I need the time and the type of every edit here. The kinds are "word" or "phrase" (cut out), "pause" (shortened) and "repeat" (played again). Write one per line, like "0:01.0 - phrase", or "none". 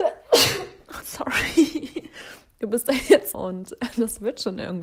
0:01.0 - word
0:03.3 - word